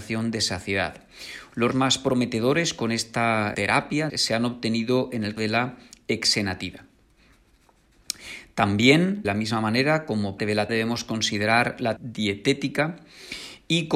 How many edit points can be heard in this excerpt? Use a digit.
8